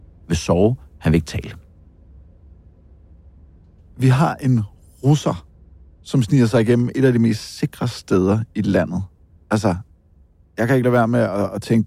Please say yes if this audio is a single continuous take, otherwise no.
yes